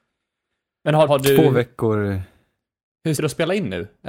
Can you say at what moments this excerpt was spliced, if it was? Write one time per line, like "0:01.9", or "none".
0:01.1
0:03.2